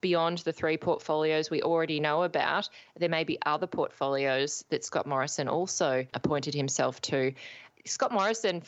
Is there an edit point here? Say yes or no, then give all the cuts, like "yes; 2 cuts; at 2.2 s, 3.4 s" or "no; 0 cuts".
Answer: no; 0 cuts